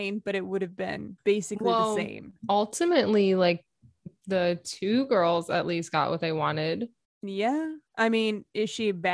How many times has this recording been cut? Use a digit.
3